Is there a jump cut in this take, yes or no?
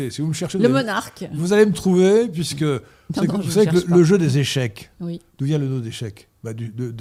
no